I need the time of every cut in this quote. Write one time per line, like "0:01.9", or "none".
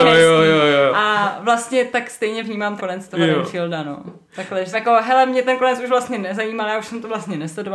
0:02.8
0:04.7